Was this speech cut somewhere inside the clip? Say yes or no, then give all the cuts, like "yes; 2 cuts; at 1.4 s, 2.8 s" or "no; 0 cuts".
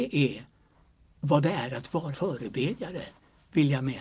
yes; 1 cut; at 2.1 s